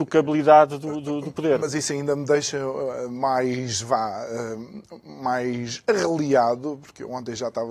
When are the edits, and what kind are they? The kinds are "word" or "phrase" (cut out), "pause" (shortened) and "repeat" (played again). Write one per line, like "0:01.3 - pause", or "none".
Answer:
none